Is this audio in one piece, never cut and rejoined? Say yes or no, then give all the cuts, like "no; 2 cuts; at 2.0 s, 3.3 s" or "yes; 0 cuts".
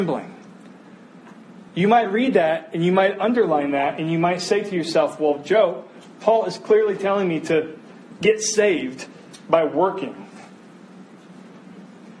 no; 1 cut; at 1.7 s